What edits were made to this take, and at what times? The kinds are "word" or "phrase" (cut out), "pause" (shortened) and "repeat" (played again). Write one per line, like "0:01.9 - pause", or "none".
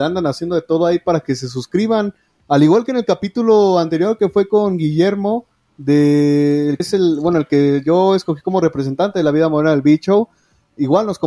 0:06.8 - word

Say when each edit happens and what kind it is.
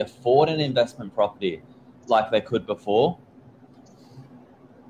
none

